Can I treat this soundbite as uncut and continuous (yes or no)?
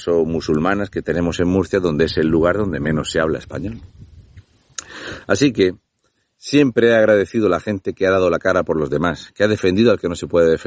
yes